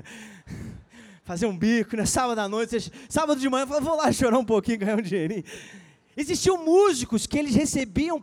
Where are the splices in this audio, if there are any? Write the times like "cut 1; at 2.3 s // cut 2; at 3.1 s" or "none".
none